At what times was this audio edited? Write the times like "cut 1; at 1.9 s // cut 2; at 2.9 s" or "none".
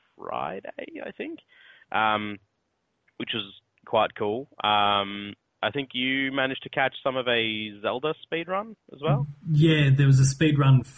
none